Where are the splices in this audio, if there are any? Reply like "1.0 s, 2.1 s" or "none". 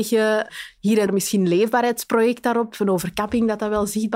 1.1 s